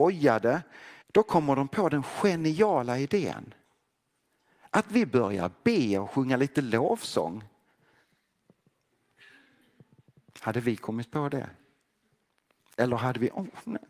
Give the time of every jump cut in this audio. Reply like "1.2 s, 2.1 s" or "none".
1.0 s